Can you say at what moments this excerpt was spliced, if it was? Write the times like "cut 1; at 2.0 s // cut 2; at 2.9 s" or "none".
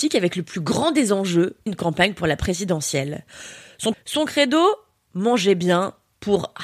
cut 1; at 1.7 s // cut 2; at 3.9 s